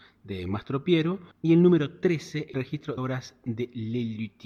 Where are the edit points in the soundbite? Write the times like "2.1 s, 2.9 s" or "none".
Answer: 1.3 s, 2.5 s, 3.0 s